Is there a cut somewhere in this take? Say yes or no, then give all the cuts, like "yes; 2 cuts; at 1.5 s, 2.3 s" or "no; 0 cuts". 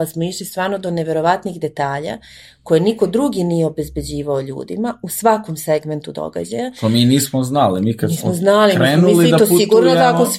no; 0 cuts